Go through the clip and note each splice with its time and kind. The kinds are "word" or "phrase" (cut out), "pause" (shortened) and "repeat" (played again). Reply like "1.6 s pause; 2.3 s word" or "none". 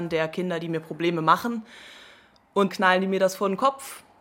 2.7 s word